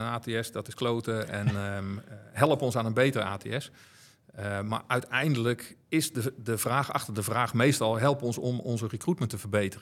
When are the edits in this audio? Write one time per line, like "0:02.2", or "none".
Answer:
0:05.8